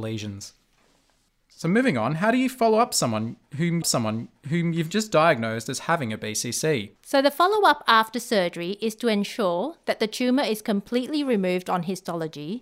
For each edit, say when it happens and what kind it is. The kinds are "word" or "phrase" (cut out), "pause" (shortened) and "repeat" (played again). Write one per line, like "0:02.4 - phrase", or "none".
0:03.8 - repeat
0:07.0 - pause